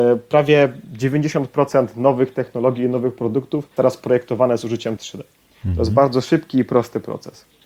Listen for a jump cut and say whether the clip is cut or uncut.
cut